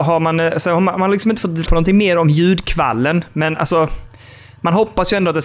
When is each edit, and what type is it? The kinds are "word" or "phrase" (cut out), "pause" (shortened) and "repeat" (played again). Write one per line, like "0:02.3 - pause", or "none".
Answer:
0:01.7 - word